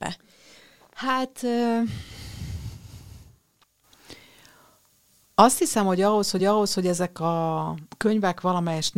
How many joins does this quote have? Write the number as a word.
one